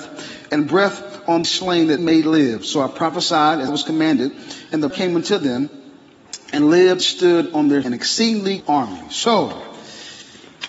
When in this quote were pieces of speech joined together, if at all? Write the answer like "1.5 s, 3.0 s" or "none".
1.4 s, 2.0 s, 3.7 s, 4.9 s, 6.6 s, 7.0 s, 7.8 s, 8.6 s